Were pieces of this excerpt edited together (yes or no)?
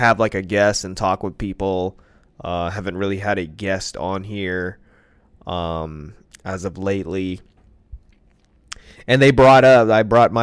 no